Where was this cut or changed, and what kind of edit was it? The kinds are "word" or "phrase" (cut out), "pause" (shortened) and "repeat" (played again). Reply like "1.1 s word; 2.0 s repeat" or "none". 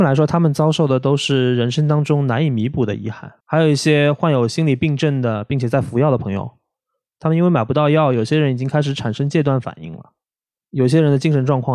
3.4 s pause